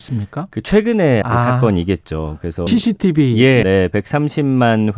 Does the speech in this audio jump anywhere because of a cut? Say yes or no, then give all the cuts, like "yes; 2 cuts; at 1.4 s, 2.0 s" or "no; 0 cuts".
yes; 3 cuts; at 1.2 s, 2.7 s, 3.6 s